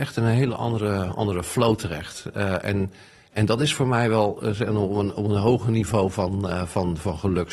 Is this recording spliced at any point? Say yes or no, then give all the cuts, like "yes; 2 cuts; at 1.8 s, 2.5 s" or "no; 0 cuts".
no; 0 cuts